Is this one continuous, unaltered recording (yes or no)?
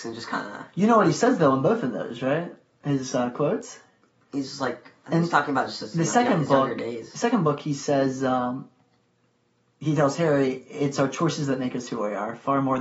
yes